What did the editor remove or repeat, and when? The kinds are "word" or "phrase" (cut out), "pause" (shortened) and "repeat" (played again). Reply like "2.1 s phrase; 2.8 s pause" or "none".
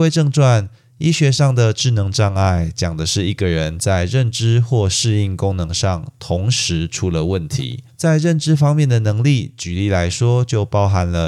7.9 s pause